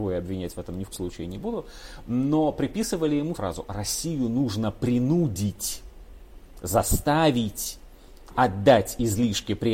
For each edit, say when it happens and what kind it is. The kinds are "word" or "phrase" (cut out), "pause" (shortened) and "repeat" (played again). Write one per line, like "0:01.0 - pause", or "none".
0:00.9 - word
0:03.3 - word